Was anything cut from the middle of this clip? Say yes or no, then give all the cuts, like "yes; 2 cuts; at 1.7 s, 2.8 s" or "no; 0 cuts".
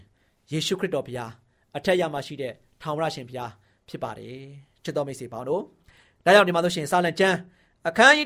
no; 0 cuts